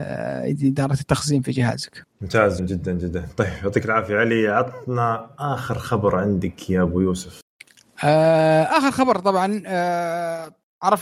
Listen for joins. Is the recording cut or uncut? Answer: cut